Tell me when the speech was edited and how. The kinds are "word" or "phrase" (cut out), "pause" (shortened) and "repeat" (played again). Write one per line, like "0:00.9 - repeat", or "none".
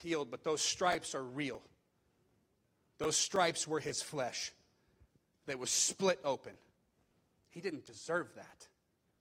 none